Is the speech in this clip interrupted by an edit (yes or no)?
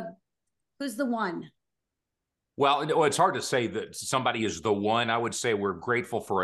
no